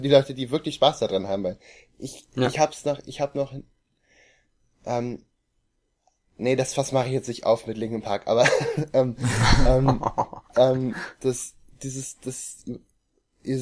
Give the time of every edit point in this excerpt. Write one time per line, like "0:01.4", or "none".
none